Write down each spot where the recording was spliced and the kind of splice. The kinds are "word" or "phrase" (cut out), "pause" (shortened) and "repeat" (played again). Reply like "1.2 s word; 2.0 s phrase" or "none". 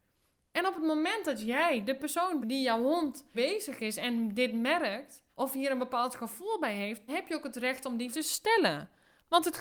2.4 s word; 3.3 s word; 5.3 s pause; 7.1 s word; 8.1 s word